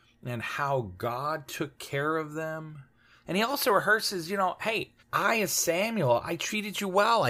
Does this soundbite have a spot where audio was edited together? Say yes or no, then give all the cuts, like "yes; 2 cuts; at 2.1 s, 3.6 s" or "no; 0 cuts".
yes; 2 cuts; at 2.9 s, 5.0 s